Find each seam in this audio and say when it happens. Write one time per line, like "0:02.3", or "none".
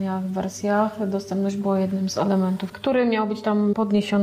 none